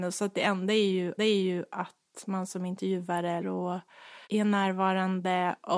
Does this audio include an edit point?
yes; 3 cuts; at 1.2 s, 3.4 s, 4.2 s

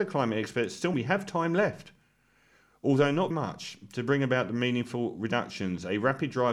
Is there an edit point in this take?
yes; 2 cuts; at 0.9 s, 3.3 s

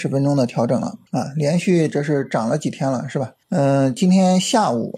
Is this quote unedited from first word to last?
no; 2 cuts; at 1.1 s, 3.4 s

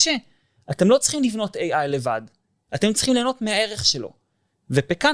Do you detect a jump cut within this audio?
no; 0 cuts

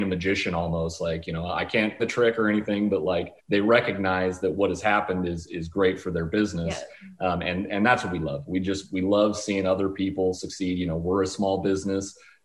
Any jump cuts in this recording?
yes; 2 cuts; at 2.0 s, 3.4 s

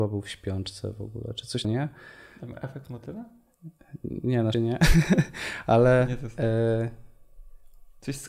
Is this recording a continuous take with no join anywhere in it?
no; 2 cuts; at 1.6 s, 4.5 s

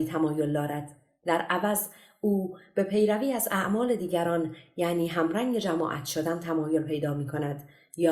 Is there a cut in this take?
no; 0 cuts

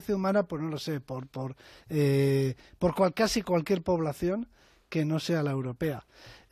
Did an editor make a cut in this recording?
no; 0 cuts

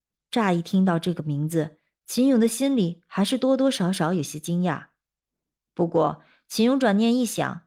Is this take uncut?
yes; 0 cuts

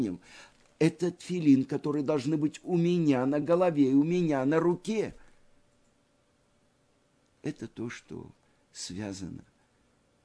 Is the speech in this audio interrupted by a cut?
no; 0 cuts

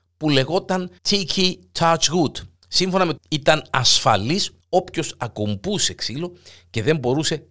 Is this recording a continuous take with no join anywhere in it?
no; 4 cuts; at 1.0 s, 2.6 s, 3.2 s, 4.6 s

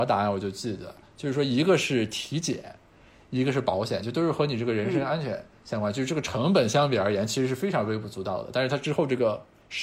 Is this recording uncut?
yes; 0 cuts

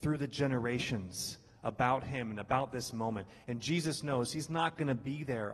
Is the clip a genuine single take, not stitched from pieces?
yes; 0 cuts

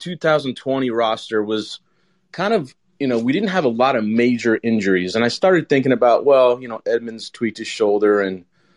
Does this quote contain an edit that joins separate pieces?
no; 0 cuts

